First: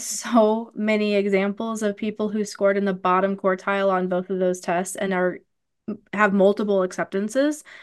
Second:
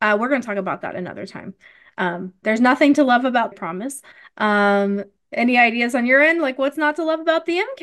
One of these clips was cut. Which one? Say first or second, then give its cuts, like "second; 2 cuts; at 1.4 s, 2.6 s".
second; 2 cuts; at 2.4 s, 3.5 s